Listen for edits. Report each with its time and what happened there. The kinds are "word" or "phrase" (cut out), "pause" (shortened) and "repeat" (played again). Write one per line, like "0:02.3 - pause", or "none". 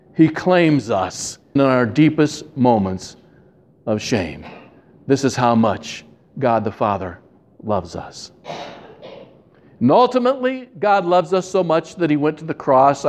0:01.6 - word